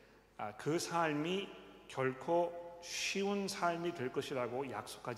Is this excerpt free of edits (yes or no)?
yes